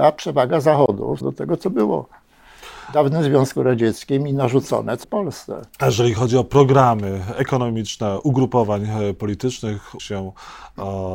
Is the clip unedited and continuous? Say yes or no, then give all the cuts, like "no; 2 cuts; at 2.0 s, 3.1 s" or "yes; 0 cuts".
no; 3 cuts; at 1.2 s, 5.0 s, 10.0 s